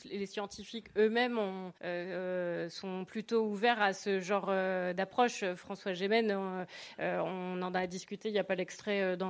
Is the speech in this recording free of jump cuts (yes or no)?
no